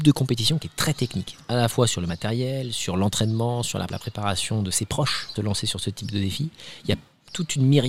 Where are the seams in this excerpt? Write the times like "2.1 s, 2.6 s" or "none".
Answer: 3.9 s, 5.4 s

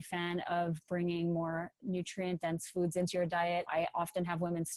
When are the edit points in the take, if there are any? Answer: 3.7 s

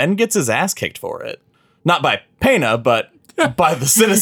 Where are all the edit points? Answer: 1.5 s

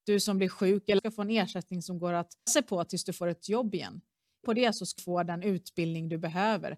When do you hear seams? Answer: 1.0 s, 2.5 s, 3.4 s, 4.4 s, 5.0 s

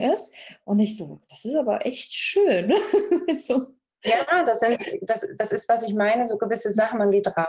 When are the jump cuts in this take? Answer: none

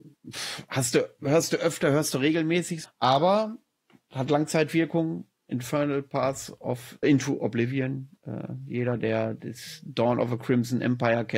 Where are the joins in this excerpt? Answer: 2.8 s, 7.0 s

